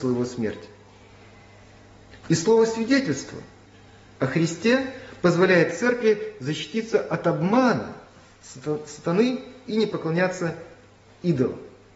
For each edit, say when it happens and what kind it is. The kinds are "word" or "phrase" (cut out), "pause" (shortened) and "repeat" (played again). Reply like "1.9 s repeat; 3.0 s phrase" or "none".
none

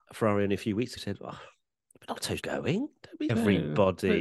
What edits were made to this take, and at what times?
1.0 s word; 2.4 s word; 3.3 s word

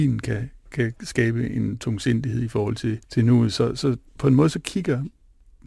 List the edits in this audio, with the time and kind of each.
1.0 s pause; 3.0 s pause; 4.1 s pause

